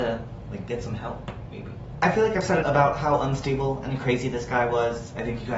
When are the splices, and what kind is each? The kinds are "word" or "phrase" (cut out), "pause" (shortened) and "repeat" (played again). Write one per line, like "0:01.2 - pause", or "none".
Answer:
0:02.6 - word